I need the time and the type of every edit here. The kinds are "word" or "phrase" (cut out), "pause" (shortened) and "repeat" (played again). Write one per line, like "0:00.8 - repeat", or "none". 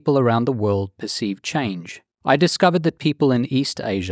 0:02.1 - pause